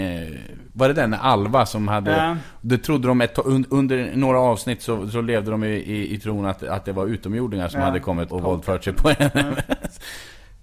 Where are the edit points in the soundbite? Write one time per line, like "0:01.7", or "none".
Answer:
0:08.3